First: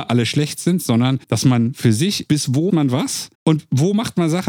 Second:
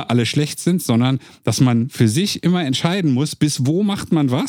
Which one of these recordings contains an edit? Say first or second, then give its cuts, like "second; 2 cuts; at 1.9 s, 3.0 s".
first; 4 cuts; at 1.2 s, 2.3 s, 2.7 s, 3.3 s